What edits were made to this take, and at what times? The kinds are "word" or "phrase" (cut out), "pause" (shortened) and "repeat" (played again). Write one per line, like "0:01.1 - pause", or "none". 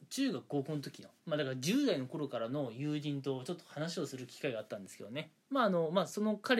0:01.2 - pause
0:05.4 - pause